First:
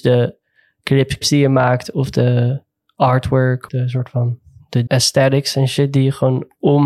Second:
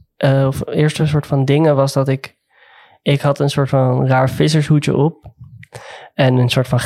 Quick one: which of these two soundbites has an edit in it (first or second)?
first